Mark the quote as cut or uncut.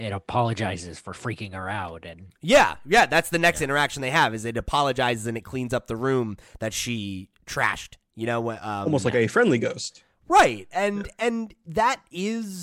uncut